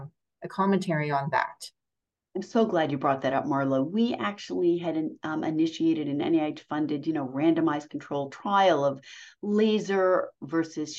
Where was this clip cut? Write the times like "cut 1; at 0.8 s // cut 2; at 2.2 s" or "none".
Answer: none

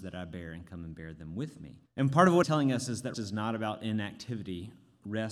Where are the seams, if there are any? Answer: cut 1; at 1.9 s // cut 2; at 2.4 s // cut 3; at 3.1 s

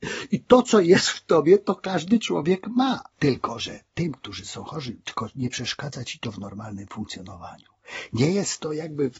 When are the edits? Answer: cut 1; at 3.1 s

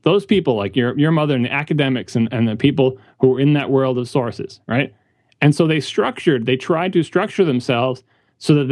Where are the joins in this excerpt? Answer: none

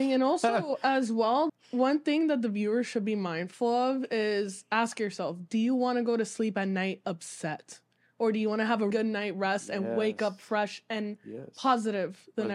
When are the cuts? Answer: cut 1; at 1.5 s // cut 2; at 8.9 s

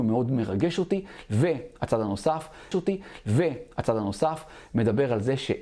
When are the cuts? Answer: cut 1; at 2.7 s

